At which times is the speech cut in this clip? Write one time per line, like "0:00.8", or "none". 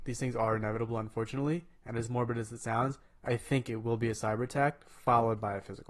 none